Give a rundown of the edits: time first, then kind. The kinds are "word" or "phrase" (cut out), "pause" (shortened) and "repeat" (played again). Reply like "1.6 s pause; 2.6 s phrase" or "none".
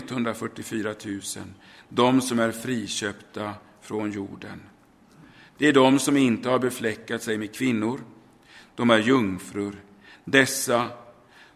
none